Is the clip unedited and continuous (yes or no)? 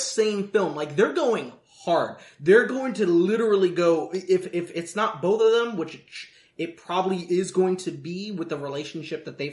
yes